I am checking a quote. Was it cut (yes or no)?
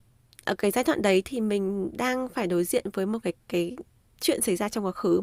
yes